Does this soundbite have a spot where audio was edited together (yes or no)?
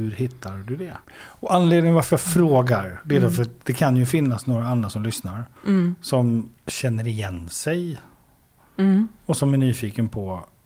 yes